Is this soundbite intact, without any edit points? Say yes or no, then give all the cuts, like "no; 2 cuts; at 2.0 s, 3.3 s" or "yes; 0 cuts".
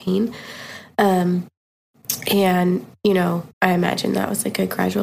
no; 1 cut; at 3.5 s